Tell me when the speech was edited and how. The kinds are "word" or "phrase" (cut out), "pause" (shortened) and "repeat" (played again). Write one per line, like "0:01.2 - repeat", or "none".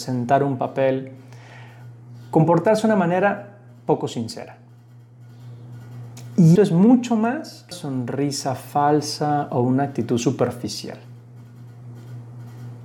0:06.6 - word
0:07.7 - word

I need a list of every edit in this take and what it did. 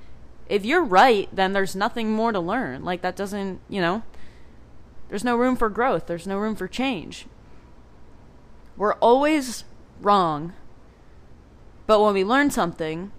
none

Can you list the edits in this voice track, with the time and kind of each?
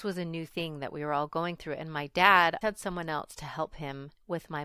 0:02.6 - word

